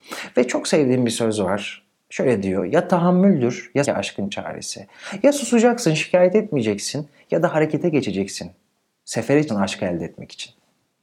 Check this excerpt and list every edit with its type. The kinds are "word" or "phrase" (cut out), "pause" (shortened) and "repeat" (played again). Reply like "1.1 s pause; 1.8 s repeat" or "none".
3.8 s phrase; 9.5 s word